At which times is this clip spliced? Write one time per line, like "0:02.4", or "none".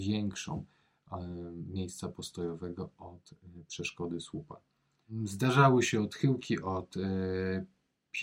none